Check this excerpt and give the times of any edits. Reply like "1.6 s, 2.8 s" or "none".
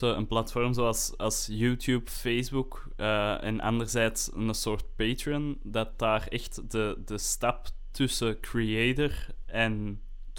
none